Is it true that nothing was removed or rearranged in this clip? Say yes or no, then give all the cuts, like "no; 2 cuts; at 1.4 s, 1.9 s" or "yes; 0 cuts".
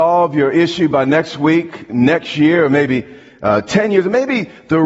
yes; 0 cuts